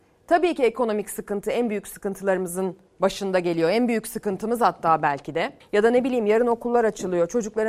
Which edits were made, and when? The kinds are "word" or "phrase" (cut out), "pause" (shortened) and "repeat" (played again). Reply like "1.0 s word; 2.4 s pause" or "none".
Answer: 5.6 s pause